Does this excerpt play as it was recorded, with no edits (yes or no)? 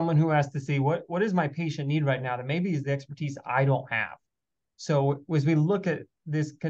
yes